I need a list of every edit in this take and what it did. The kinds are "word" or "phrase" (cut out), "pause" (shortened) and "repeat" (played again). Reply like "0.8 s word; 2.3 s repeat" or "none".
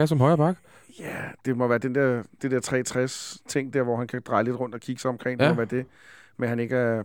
none